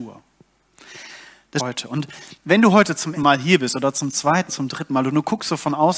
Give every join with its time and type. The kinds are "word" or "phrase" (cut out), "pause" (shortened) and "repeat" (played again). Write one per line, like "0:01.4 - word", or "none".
0:01.6 - phrase
0:03.1 - word
0:04.5 - word

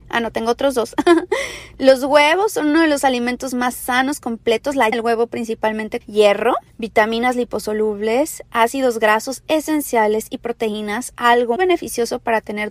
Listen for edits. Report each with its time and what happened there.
0:04.9 - word
0:06.0 - word
0:11.6 - word

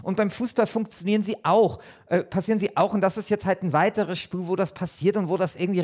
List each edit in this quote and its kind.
none

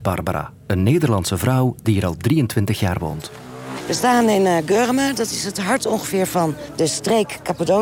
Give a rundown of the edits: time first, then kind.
none

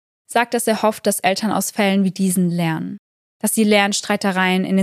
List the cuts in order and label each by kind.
none

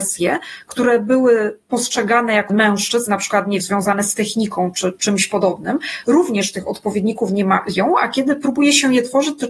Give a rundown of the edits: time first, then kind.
0:02.5 - word
0:03.6 - word
0:04.9 - word

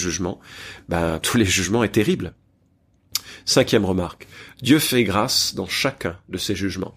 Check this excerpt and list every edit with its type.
0:01.2 - word

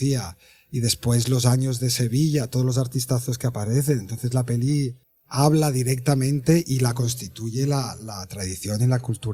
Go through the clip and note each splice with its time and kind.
0:05.0 - pause

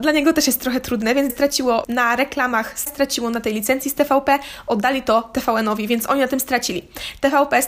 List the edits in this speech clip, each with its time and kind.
0:01.3 - word
0:01.8 - word
0:02.9 - word

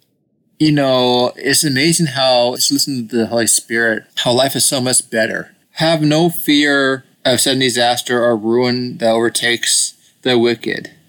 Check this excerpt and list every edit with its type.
0:02.6 - phrase
0:04.1 - pause
0:05.6 - pause
0:07.1 - pause

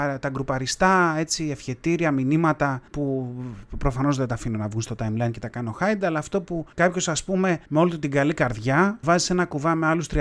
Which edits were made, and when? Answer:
0:02.9 - pause
0:06.7 - pause
0:07.7 - pause
0:09.0 - word

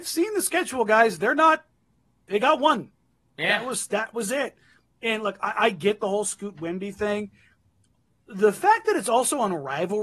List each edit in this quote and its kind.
none

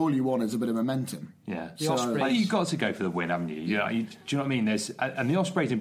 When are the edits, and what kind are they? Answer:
none

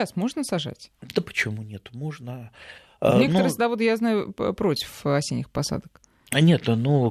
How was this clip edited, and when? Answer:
none

